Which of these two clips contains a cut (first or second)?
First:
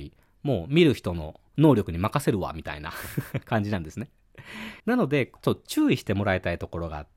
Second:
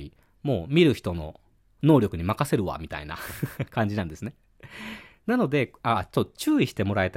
first